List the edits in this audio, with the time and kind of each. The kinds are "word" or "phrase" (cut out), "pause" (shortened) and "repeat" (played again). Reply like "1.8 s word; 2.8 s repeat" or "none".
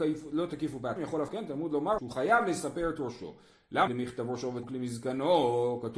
1.0 s word; 1.3 s word; 2.0 s word; 3.9 s word; 4.6 s word